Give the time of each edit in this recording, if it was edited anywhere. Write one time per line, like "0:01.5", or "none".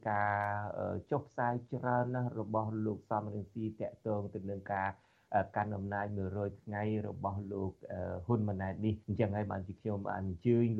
0:09.0